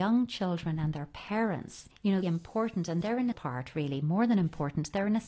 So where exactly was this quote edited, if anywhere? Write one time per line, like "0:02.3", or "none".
0:01.9
0:02.2
0:03.3